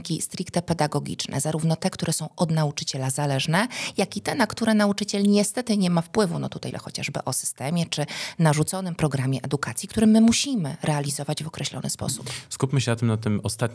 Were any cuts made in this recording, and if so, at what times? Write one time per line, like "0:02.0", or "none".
0:06.7